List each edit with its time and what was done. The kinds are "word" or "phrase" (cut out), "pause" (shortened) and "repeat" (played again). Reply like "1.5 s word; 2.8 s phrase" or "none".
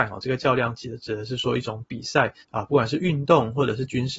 2.4 s pause